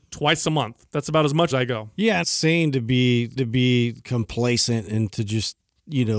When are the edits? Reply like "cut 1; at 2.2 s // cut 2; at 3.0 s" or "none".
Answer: cut 1; at 1.5 s // cut 2; at 2.2 s // cut 3; at 3.4 s // cut 4; at 5.1 s